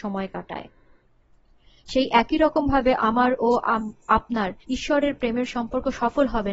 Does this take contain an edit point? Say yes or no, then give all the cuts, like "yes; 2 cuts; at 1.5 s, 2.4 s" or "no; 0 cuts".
yes; 1 cut; at 4.6 s